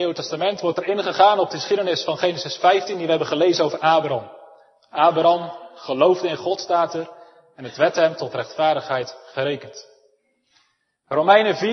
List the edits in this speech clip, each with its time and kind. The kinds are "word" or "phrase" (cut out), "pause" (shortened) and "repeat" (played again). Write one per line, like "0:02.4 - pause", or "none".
none